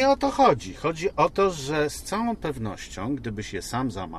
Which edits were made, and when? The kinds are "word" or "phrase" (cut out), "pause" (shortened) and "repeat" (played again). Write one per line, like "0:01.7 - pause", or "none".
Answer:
none

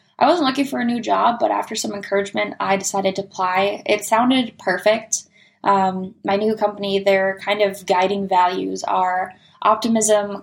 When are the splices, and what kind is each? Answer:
none

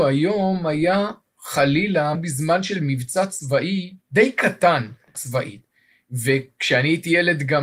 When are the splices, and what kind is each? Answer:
0:02.1 - phrase
0:04.0 - pause
0:05.1 - word

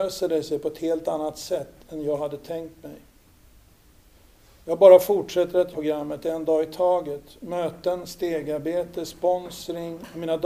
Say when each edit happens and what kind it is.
0:05.7 - word

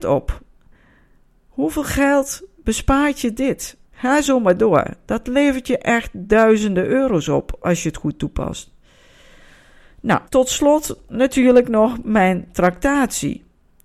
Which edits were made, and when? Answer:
0:03.8 - pause
0:10.3 - pause

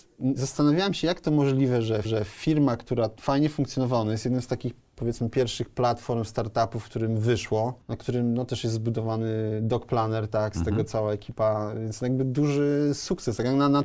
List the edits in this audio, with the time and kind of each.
0:02.0 - repeat

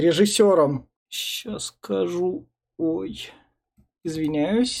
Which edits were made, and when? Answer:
0:01.0 - pause

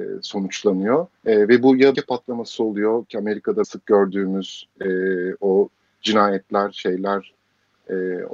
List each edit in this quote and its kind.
0:01.2 - pause
0:01.9 - phrase
0:03.6 - word

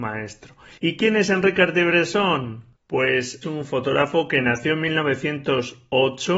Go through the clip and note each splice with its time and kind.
0:03.4 - phrase

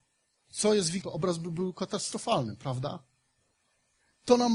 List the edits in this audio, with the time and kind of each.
0:01.0 - word

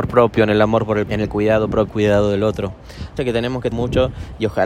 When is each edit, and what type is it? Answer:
0:01.1 - word
0:01.9 - phrase
0:03.2 - word
0:03.7 - word

